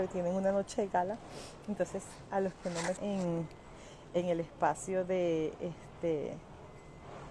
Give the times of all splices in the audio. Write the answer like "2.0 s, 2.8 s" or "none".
2.9 s